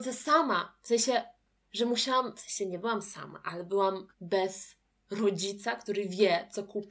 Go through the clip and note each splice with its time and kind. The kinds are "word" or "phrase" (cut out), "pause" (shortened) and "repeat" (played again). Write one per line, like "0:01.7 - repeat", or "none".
0:04.1 - pause